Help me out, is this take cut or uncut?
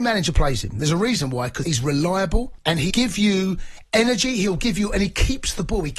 cut